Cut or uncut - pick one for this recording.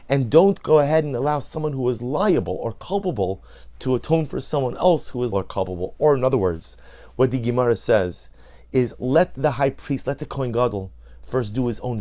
cut